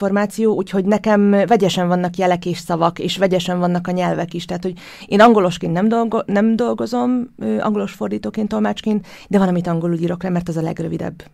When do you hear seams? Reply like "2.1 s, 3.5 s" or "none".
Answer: none